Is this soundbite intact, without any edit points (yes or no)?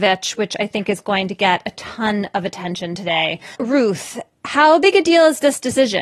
no